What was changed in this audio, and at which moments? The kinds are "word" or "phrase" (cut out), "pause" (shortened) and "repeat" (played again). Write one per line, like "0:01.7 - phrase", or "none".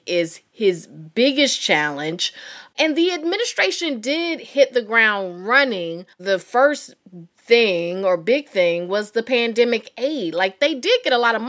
0:06.1 - pause
0:07.3 - pause